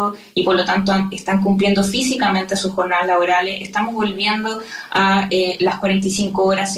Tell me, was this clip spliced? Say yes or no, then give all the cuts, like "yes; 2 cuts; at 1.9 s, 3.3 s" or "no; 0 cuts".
no; 0 cuts